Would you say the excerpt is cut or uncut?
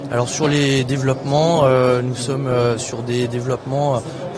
uncut